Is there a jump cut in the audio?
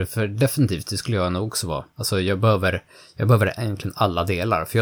no; 0 cuts

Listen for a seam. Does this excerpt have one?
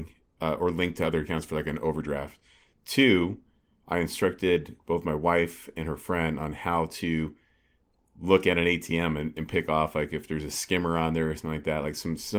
no; 0 cuts

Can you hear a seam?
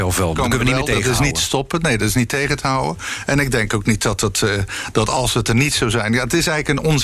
no; 0 cuts

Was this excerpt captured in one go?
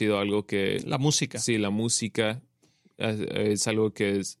yes; 0 cuts

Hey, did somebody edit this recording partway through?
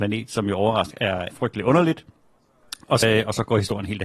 yes; 3 cuts; at 0.9 s, 1.3 s, 3.0 s

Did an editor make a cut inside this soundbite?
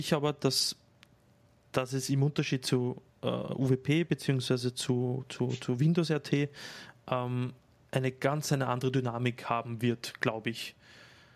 no; 0 cuts

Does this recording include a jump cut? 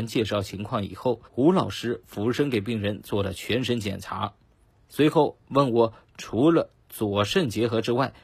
yes; 2 cuts; at 1.3 s, 4.6 s

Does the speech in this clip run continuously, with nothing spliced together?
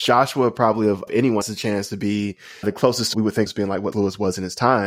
no; 6 cuts; at 1.1 s, 1.4 s, 2.6 s, 3.1 s, 3.5 s, 3.9 s

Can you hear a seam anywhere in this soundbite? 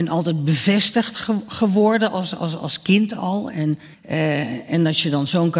yes; 1 cut; at 3.9 s

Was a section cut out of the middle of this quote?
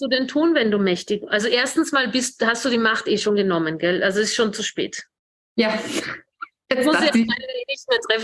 no; 0 cuts

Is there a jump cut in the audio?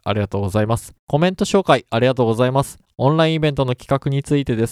yes; 1 cut; at 1.0 s

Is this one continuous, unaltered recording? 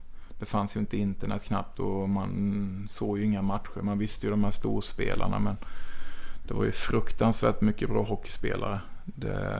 yes; 0 cuts

